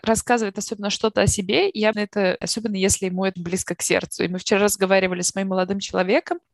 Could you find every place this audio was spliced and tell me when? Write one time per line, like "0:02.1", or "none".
0:01.9
0:02.4
0:03.4